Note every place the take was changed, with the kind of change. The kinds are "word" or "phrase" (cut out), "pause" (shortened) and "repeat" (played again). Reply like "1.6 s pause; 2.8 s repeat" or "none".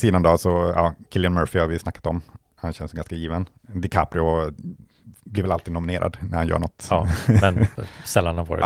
none